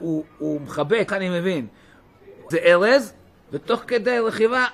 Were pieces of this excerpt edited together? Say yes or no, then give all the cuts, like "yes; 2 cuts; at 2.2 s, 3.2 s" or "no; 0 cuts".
yes; 2 cuts; at 1.1 s, 2.5 s